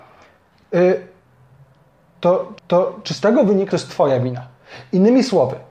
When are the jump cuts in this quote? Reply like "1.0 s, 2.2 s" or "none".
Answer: 2.6 s, 3.7 s